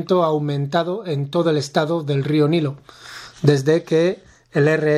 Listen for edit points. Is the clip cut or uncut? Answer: uncut